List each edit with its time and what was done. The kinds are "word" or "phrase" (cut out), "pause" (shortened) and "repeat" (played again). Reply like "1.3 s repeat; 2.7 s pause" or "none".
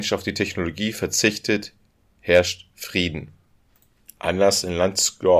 none